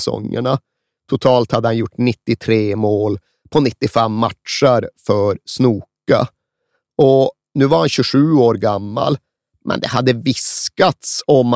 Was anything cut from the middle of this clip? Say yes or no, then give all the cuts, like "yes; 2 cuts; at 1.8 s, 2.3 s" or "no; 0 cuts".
no; 0 cuts